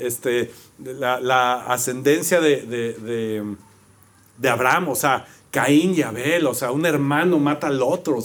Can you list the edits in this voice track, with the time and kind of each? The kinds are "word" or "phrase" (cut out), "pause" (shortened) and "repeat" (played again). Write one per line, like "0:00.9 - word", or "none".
none

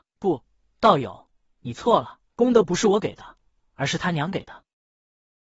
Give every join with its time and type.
0:02.3 - pause

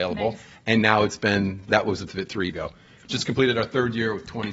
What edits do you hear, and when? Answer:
0:02.1 - word
0:02.5 - word

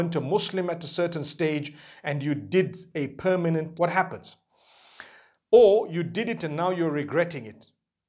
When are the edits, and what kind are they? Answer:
0:03.7 - word

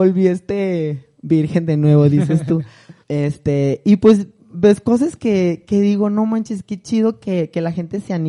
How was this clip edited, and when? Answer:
0:03.0 - pause

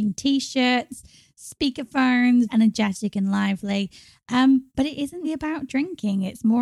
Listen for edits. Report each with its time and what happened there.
0:02.5 - word
0:05.2 - word

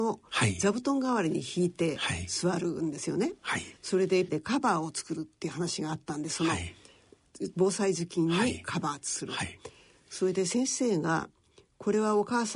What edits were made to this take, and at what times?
0:03.8 - pause
0:04.3 - word

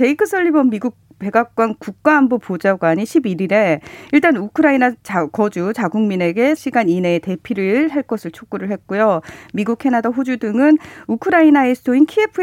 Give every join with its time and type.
0:06.6 - word

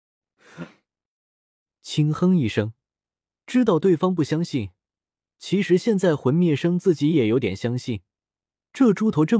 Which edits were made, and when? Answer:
none

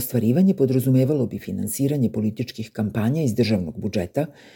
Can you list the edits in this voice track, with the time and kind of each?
none

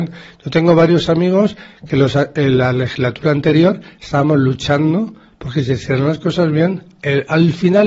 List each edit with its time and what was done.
none

